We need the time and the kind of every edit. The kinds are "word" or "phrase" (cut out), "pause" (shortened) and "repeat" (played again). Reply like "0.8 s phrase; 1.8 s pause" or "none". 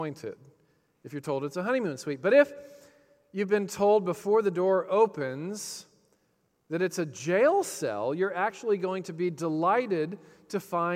none

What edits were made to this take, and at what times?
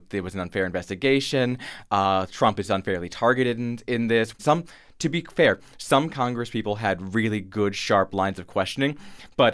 none

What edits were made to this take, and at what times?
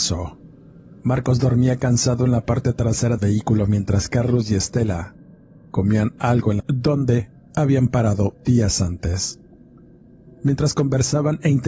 3.2 s word; 6.6 s phrase

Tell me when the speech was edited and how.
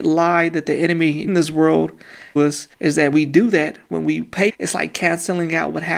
1.3 s word; 2.4 s phrase; 2.7 s pause; 3.1 s word; 4.5 s phrase

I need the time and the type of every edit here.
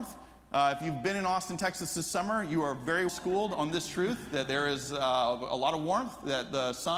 3.1 s word

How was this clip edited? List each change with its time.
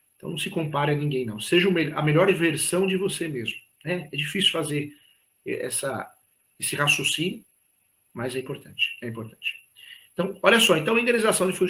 none

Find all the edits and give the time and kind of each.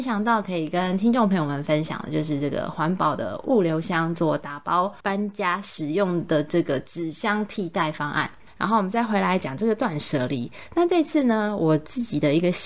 5.0 s pause

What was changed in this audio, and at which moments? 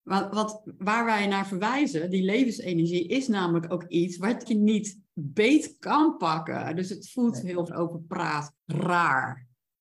4.5 s word; 5.1 s pause; 7.7 s phrase; 8.6 s pause

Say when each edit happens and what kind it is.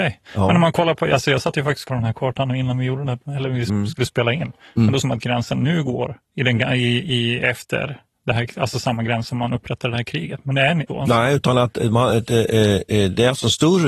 1.9 s phrase; 5.0 s phrase; 6.2 s pause; 9.8 s word; 10.9 s phrase

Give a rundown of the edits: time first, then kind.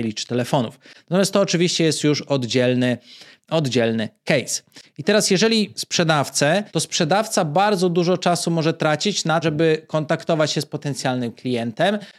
5.7 s word; 6.7 s pause; 9.4 s word

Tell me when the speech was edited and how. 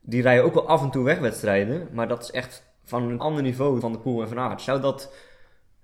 3.2 s word; 3.8 s word

